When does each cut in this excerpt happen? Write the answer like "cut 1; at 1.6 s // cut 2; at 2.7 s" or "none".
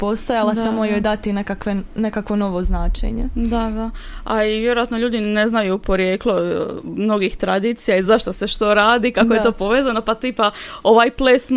none